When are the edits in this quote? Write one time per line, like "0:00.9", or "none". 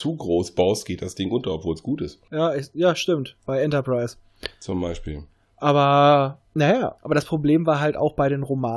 0:02.2
0:03.4
0:06.5